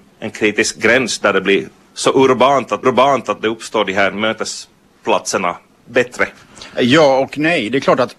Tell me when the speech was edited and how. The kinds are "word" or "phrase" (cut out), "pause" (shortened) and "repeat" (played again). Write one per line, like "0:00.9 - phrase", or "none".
0:02.8 - repeat
0:05.7 - pause